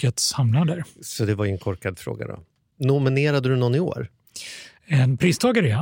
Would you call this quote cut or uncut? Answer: uncut